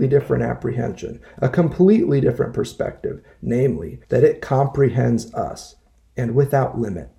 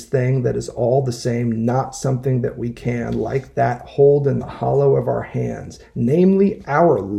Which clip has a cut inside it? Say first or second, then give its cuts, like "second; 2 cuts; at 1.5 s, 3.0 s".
first; 1 cut; at 4.0 s